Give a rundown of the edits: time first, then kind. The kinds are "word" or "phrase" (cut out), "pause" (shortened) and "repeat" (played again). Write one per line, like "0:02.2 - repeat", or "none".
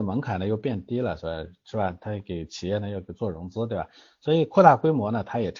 none